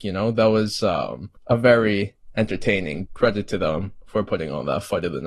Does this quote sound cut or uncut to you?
cut